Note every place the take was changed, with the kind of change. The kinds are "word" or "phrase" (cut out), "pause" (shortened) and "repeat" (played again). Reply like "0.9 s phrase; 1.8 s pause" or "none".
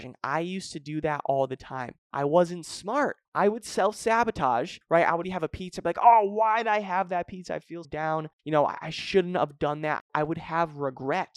3.3 s pause; 4.8 s pause; 5.2 s word; 7.8 s word; 8.3 s pause